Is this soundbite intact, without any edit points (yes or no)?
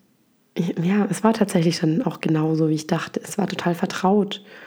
yes